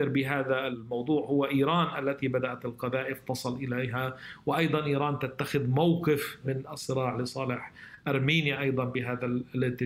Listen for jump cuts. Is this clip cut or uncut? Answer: uncut